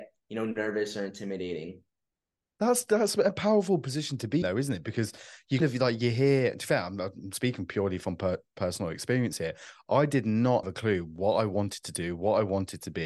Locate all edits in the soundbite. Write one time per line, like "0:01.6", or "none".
0:04.4
0:05.6
0:10.6